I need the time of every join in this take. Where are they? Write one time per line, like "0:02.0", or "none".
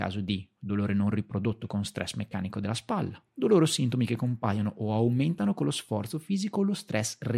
0:03.3